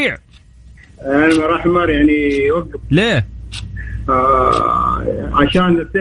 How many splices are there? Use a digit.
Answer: 1